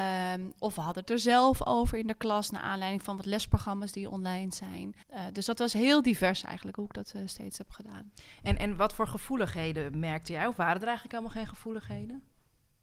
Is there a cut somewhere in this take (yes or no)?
yes